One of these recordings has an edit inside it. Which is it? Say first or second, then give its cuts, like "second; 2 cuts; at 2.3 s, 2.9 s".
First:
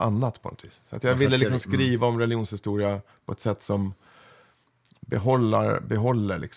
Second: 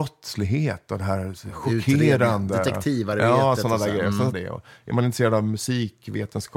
second; 1 cut; at 4.3 s